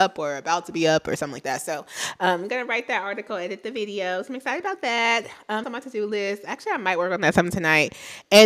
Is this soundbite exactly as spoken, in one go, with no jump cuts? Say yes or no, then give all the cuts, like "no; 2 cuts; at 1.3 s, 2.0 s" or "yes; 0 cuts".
no; 1 cut; at 5.6 s